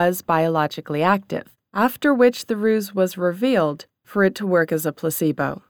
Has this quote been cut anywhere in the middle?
no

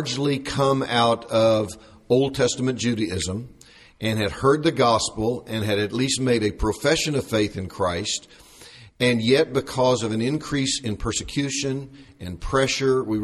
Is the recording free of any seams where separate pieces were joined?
yes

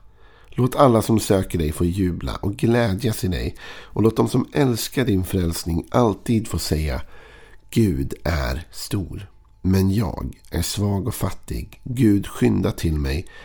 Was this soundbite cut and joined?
no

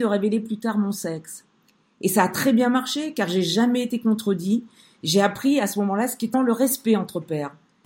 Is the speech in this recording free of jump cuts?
no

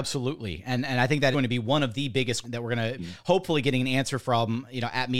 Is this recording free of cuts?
no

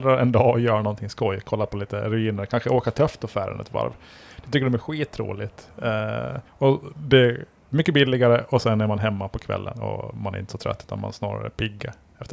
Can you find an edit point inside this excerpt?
yes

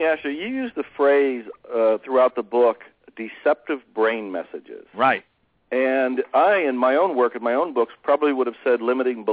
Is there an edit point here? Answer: no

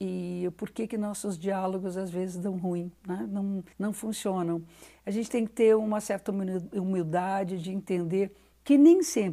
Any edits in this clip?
yes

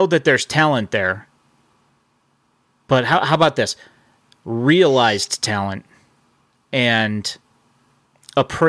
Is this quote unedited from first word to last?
yes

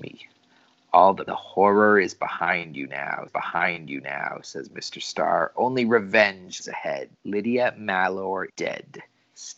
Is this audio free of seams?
no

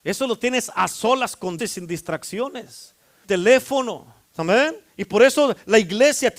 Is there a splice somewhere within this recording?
yes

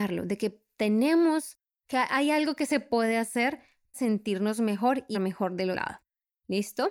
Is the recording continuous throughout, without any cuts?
no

